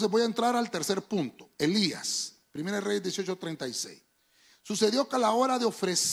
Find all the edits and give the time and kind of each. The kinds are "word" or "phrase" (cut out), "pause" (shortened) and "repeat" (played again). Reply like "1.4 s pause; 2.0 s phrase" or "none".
none

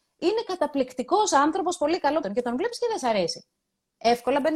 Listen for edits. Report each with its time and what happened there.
2.2 s word

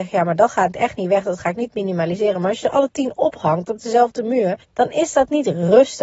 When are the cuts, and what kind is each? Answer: 4.6 s pause

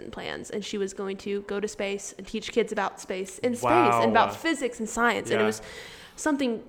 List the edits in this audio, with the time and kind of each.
none

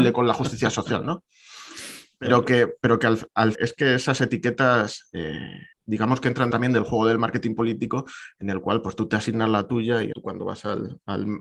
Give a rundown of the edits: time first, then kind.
3.5 s word; 5.7 s pause; 6.5 s phrase; 10.1 s word

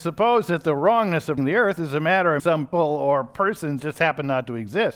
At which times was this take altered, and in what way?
1.4 s word; 2.4 s word; 2.7 s word; 3.8 s word

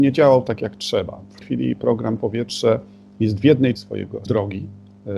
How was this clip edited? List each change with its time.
1.4 s word; 2.2 s word; 3.7 s word; 4.3 s word

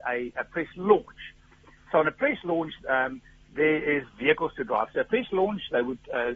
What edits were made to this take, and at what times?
none

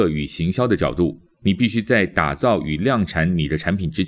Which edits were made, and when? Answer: none

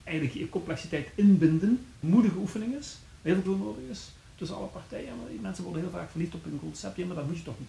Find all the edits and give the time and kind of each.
2.0 s word; 3.4 s word

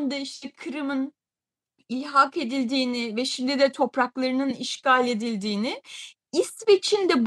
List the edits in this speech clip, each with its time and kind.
none

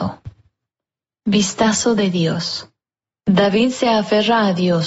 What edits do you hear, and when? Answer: none

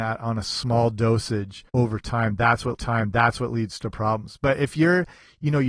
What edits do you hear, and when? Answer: 1.7 s pause; 2.7 s repeat

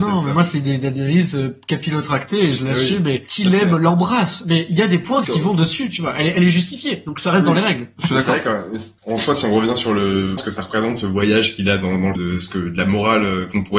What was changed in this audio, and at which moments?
5.2 s word; 10.4 s word; 12.2 s word

